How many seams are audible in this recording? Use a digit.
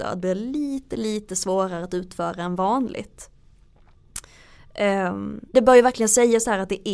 1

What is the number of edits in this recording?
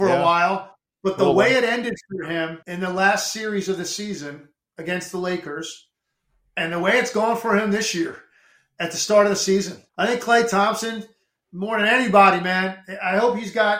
2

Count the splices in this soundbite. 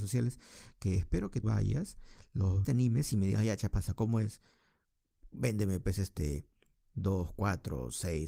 2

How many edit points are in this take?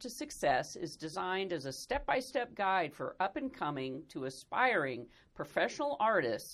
0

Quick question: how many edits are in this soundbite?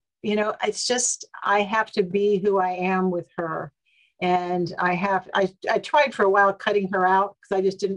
0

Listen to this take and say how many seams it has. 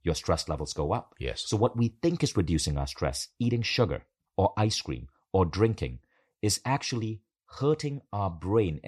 0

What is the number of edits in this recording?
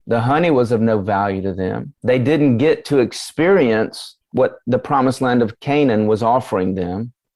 2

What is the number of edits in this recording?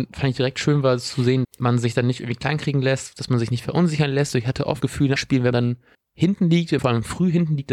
6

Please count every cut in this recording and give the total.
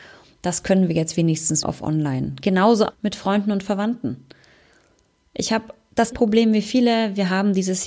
3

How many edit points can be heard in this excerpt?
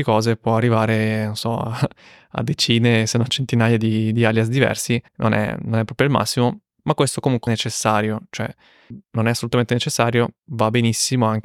3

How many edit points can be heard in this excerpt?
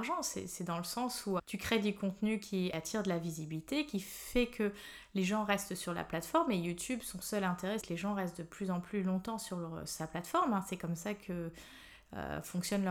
2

